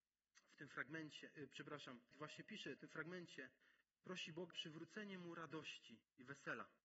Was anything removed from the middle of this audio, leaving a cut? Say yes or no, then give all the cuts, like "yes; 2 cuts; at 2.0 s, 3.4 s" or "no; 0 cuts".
yes; 3 cuts; at 2.1 s, 2.8 s, 4.5 s